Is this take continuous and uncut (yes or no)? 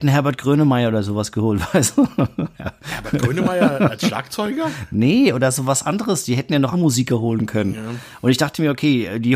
no